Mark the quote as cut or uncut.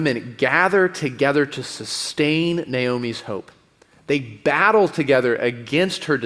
uncut